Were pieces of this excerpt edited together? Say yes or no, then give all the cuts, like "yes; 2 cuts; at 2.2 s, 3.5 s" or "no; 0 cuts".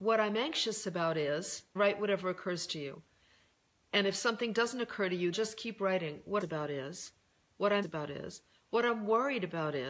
yes; 4 cuts; at 1.8 s, 5.3 s, 6.4 s, 7.8 s